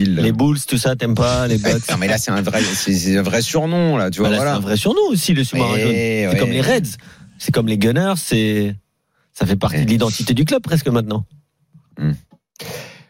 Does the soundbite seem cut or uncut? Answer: uncut